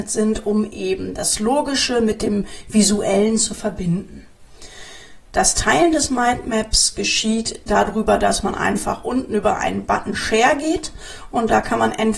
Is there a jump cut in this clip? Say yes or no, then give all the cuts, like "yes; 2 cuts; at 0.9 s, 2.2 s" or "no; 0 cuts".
no; 0 cuts